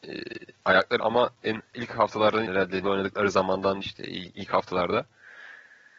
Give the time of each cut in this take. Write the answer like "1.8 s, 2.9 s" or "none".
1.0 s, 1.4 s, 1.7 s, 2.5 s, 2.8 s, 3.8 s